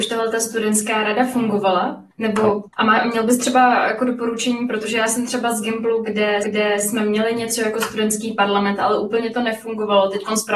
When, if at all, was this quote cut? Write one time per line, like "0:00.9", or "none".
0:02.1
0:02.7
0:06.4

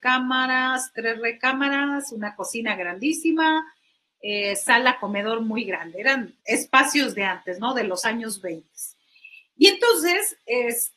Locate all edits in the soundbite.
0:06.4

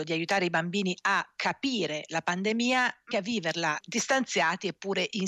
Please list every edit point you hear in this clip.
0:03.1
0:03.8

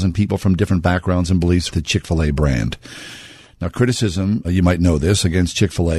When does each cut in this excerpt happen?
0:01.7
0:04.4

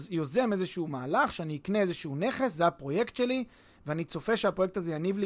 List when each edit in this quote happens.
none

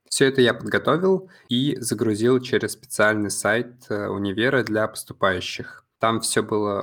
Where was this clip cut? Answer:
none

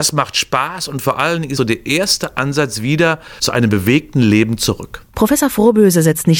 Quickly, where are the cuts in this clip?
0:01.6

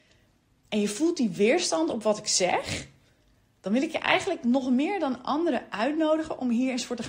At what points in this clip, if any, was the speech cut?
none

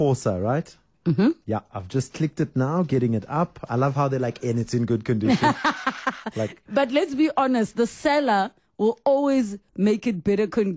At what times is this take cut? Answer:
none

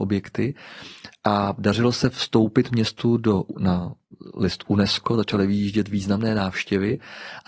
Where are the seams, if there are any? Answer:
none

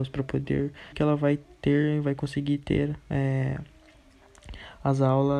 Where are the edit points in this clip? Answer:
0:00.9

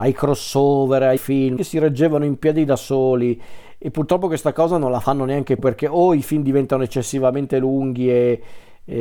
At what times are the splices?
0:01.2
0:01.6
0:05.6

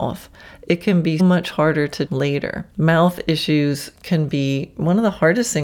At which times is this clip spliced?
0:01.2
0:02.1
0:02.7

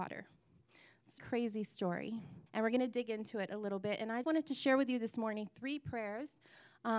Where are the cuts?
0:01.2
0:02.5
0:04.2

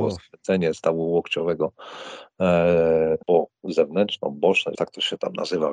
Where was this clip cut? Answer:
0:03.2
0:04.7

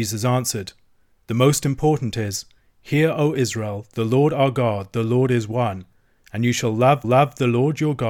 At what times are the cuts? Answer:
0:07.0

